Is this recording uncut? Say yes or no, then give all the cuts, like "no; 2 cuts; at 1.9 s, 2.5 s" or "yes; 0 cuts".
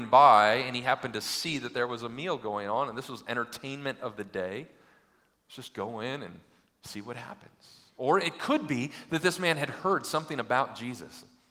yes; 0 cuts